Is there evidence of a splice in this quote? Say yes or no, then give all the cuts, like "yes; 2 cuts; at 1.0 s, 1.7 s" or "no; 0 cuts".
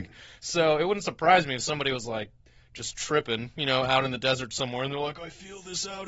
no; 0 cuts